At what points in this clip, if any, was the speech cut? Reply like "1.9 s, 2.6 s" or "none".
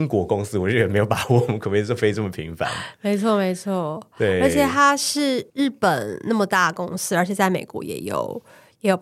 5.5 s